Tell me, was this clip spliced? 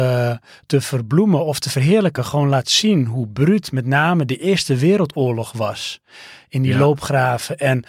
no; 0 cuts

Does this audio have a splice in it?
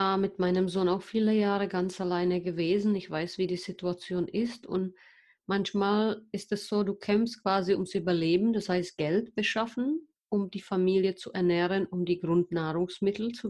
no; 0 cuts

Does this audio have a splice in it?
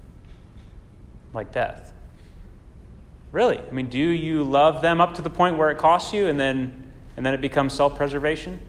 no; 0 cuts

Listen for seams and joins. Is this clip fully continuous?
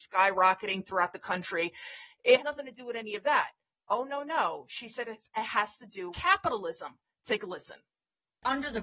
no; 2 cuts; at 2.4 s, 6.1 s

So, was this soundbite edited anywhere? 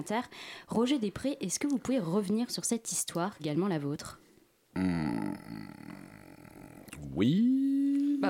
yes; 2 cuts; at 3.4 s, 4.4 s

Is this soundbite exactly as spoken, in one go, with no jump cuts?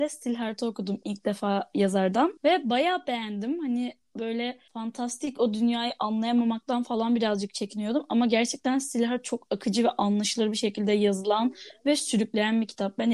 no; 2 cuts; at 2.4 s, 4.7 s

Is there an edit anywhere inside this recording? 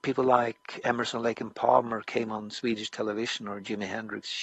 no; 0 cuts

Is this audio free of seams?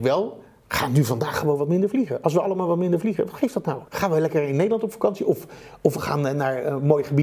no; 1 cut; at 3.9 s

